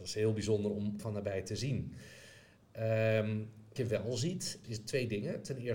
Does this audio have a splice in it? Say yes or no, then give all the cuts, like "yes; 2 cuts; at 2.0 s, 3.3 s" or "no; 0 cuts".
yes; 3 cuts; at 1.0 s, 3.8 s, 4.6 s